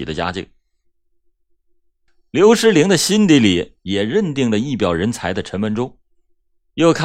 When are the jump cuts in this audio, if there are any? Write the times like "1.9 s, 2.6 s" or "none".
none